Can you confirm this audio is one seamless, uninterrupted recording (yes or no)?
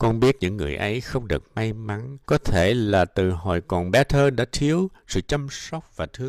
no